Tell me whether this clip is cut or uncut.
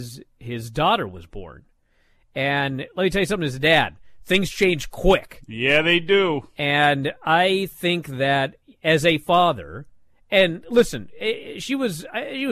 uncut